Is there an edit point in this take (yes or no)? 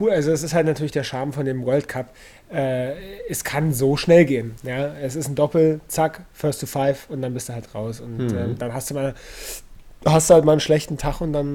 no